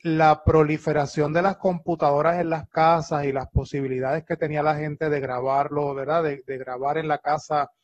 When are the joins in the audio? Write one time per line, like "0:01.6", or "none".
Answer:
none

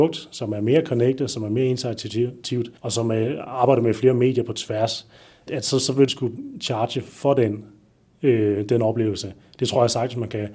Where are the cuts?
0:02.8
0:05.5
0:06.1

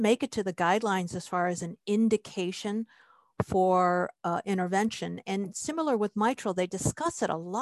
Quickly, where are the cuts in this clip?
none

